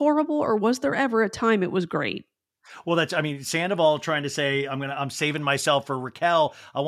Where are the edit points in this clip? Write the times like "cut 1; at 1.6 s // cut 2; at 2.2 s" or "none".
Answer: none